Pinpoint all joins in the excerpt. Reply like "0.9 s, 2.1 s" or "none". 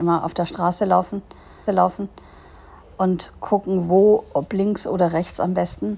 1.7 s